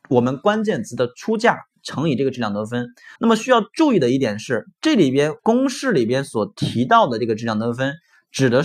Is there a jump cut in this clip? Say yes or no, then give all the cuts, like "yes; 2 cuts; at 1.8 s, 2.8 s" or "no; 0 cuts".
yes; 2 cuts; at 3.2 s, 5.4 s